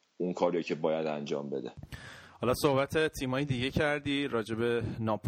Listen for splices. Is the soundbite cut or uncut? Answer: uncut